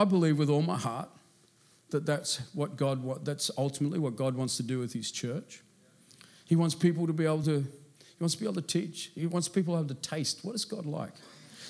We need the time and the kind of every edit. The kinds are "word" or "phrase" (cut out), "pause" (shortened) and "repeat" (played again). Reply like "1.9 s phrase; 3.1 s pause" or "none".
none